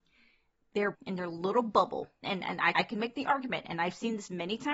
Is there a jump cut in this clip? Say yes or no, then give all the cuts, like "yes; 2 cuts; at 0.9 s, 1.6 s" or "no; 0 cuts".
yes; 3 cuts; at 0.9 s, 2.2 s, 2.7 s